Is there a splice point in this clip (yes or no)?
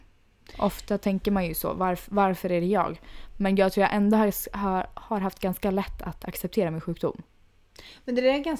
no